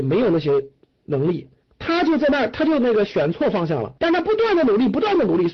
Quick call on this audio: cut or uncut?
cut